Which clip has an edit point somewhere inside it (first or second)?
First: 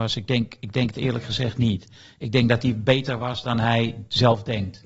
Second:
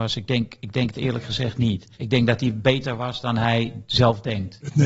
second